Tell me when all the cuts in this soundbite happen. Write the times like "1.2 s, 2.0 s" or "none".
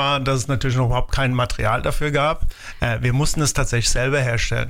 none